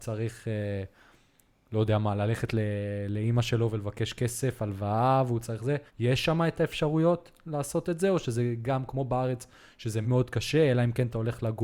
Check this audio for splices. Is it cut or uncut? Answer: cut